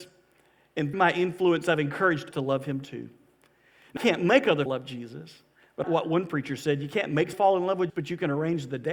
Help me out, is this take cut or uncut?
cut